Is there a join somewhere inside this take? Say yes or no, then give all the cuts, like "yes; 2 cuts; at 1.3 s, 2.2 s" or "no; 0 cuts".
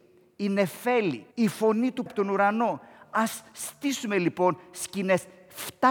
yes; 2 cuts; at 1.3 s, 2.1 s